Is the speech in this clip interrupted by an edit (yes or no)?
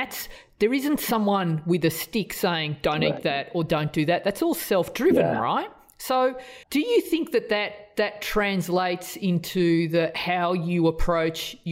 yes